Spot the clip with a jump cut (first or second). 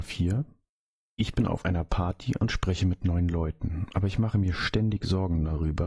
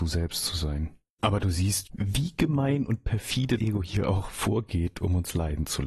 second